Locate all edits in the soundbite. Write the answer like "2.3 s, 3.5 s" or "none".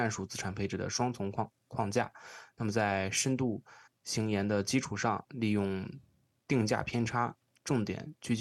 3.9 s